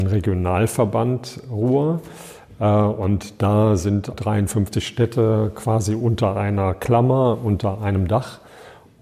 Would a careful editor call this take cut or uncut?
cut